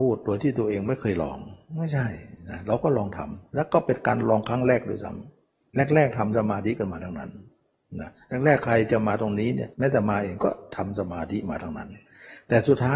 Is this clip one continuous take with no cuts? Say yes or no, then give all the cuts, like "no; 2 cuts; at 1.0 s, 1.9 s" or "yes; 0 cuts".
no; 1 cut; at 9.7 s